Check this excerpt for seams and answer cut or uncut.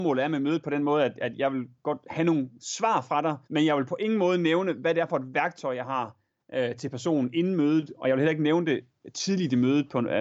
cut